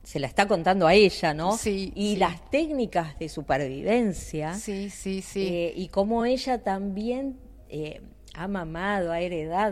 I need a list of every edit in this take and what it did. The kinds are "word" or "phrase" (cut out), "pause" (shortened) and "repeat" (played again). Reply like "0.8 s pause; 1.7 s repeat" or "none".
none